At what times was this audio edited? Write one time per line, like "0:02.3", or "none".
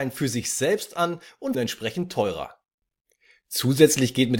0:01.5